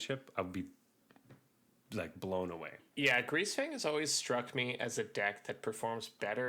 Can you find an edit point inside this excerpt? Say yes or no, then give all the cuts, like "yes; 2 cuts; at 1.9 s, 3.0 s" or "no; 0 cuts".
no; 0 cuts